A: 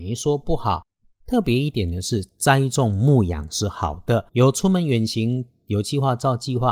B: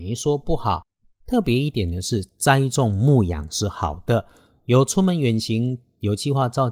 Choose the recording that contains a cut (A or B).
A